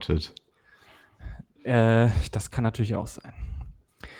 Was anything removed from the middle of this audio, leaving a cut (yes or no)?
no